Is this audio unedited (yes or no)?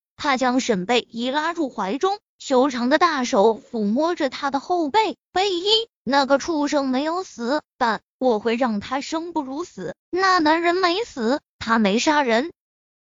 no